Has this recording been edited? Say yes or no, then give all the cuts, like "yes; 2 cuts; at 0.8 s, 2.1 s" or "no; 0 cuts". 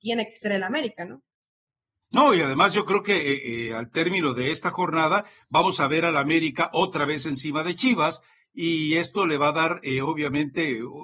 no; 0 cuts